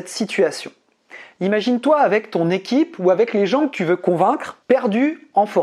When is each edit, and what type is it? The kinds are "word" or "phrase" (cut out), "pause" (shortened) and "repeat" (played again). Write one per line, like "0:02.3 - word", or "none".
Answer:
0:04.6 - pause